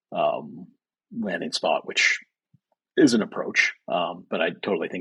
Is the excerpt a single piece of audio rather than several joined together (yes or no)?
yes